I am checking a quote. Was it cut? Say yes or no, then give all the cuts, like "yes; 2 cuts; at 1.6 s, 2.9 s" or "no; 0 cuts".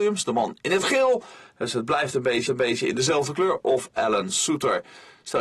yes; 1 cut; at 2.5 s